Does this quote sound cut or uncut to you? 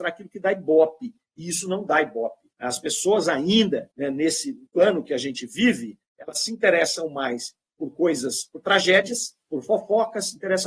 cut